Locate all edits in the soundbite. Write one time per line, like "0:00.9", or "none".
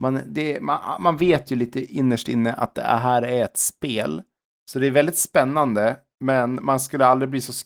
none